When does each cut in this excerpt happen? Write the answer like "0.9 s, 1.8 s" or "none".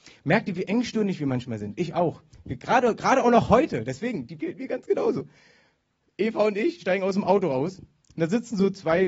4.4 s, 6.8 s